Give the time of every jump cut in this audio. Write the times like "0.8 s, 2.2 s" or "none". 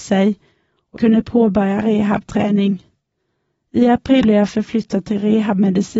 1.0 s, 4.2 s